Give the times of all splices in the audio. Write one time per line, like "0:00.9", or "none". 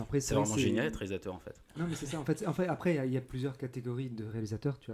0:01.7